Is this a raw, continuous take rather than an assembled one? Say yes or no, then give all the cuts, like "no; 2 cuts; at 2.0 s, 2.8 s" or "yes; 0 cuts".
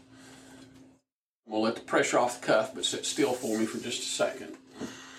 yes; 0 cuts